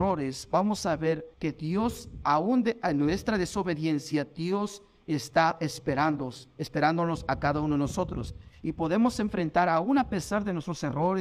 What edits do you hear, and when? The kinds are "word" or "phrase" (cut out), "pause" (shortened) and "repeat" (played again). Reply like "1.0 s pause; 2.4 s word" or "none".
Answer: 1.3 s pause